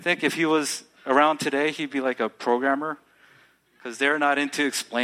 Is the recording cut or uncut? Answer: uncut